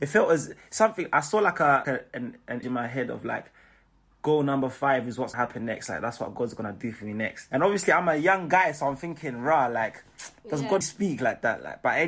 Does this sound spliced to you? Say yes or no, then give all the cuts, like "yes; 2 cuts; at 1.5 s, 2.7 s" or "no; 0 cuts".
yes; 4 cuts; at 1.8 s, 2.6 s, 5.3 s, 10.8 s